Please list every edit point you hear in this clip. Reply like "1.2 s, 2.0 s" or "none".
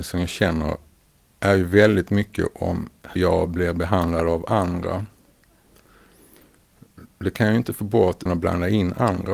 0.9 s, 3.2 s, 7.1 s, 8.3 s

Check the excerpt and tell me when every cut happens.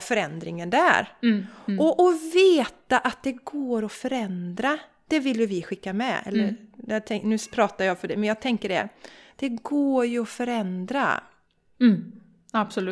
none

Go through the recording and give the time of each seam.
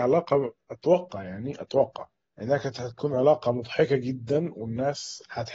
2.2 s

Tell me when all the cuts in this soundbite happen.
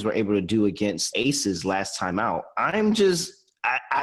1.1 s

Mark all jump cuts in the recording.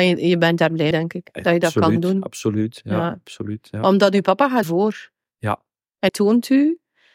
0.9 s, 4.6 s, 6.1 s

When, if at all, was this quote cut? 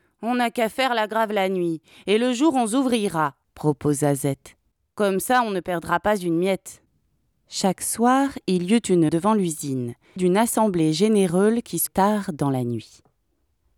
9.1 s, 10.2 s, 11.9 s

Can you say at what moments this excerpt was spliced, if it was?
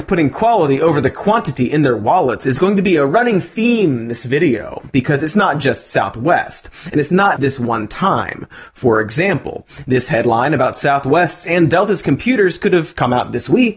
7.4 s

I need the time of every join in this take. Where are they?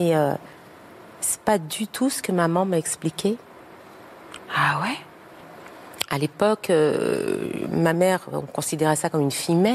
none

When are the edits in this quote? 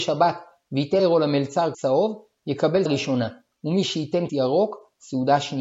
1.0 s, 1.7 s, 2.9 s, 4.3 s

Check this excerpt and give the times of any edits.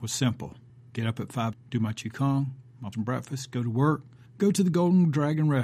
1.5 s, 2.9 s, 4.2 s

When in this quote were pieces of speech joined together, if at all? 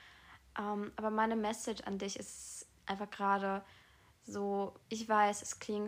4.8 s

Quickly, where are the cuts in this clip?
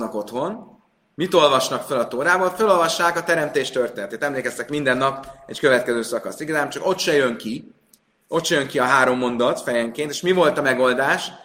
none

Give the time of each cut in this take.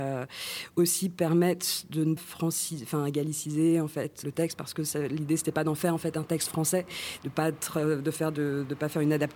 2.2 s, 4.2 s

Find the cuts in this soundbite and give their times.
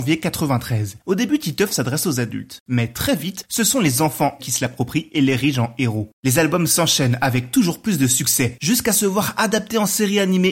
4.4 s

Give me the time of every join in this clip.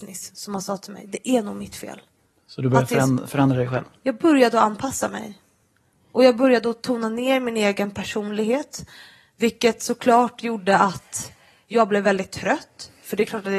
none

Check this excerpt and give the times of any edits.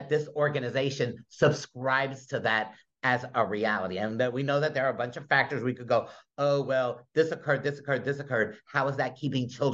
none

